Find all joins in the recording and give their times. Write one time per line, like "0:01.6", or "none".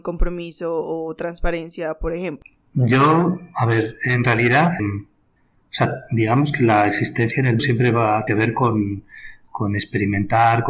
0:04.8
0:07.6
0:08.3